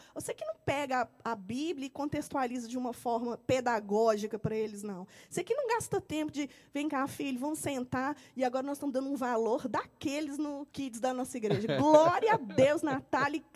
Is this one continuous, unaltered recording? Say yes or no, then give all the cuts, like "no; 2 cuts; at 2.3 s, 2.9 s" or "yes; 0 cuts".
no; 1 cut; at 10.7 s